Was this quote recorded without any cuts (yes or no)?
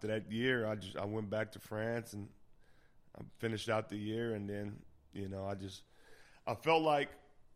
yes